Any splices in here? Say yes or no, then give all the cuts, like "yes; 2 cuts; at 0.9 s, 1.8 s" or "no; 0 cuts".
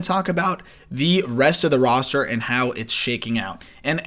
no; 0 cuts